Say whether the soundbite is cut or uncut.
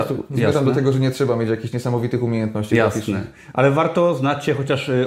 uncut